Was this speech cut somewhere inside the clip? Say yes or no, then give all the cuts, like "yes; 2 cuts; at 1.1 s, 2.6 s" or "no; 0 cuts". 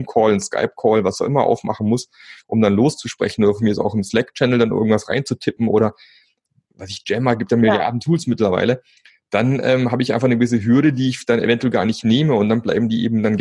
no; 0 cuts